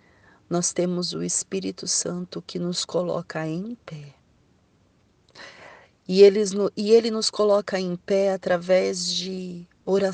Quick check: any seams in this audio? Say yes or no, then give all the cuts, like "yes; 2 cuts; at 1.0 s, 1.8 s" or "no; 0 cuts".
no; 0 cuts